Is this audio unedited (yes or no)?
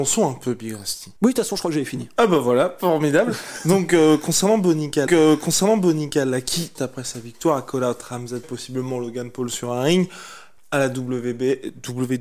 no